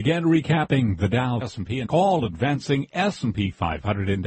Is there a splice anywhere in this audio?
yes; 2 cuts; at 1.4 s, 1.9 s

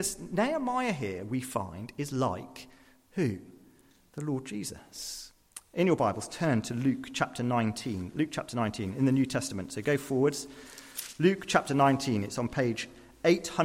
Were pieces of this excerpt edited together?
no; 0 cuts

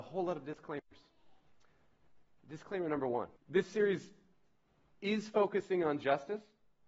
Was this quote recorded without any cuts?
no; 1 cut; at 3.4 s

